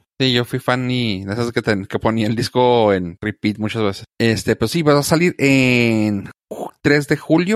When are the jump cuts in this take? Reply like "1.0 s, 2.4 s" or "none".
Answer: none